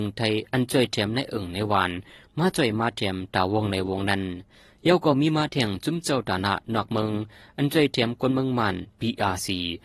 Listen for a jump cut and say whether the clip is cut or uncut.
uncut